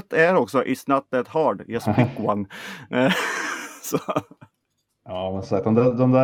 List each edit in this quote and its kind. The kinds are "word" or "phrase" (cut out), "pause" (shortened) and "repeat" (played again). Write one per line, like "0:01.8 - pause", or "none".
none

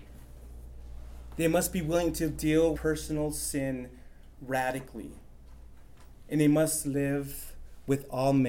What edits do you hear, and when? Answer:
0:02.7 - word

